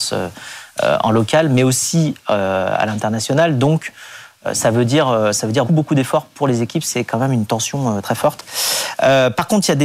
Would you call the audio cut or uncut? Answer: cut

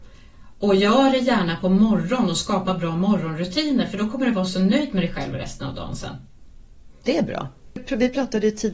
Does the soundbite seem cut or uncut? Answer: uncut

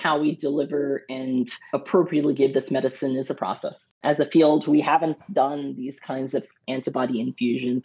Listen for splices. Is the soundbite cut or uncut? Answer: uncut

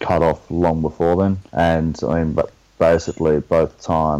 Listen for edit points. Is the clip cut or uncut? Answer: cut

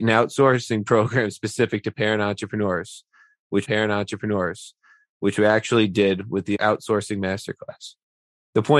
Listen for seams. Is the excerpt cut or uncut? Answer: cut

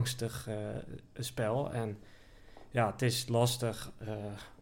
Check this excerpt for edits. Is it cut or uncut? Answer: uncut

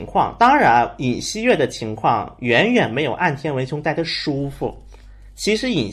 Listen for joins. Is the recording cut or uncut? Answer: uncut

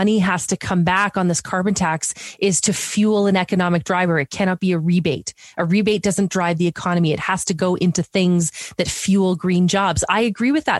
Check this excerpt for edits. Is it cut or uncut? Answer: uncut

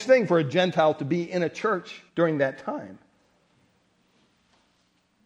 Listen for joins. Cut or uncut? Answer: cut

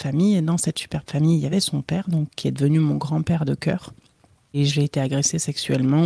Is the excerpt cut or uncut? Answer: uncut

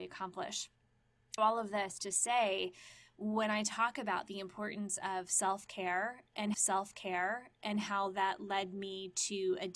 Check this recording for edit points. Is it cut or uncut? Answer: cut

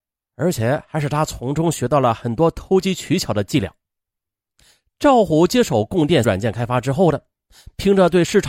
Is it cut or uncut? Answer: cut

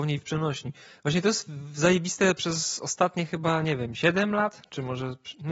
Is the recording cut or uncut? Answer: uncut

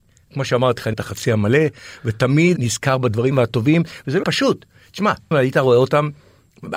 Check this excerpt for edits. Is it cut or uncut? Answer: cut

